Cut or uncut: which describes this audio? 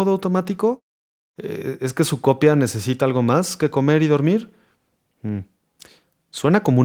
uncut